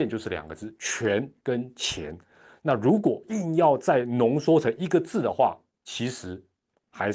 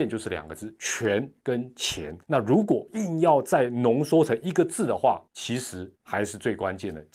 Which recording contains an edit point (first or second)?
second